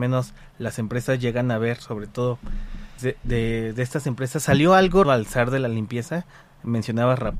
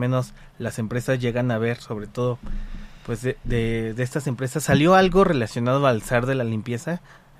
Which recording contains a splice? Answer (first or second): first